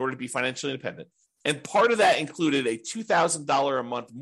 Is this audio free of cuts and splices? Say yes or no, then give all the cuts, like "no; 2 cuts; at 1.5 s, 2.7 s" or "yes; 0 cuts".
yes; 0 cuts